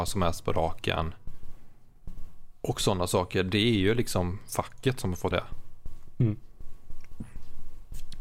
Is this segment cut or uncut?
cut